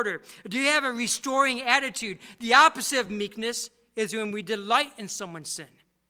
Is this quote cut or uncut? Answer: uncut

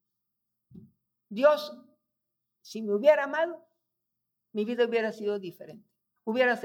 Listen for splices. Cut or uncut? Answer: uncut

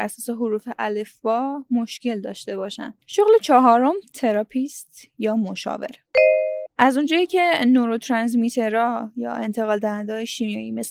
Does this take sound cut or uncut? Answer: uncut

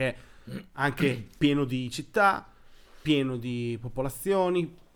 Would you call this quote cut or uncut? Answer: uncut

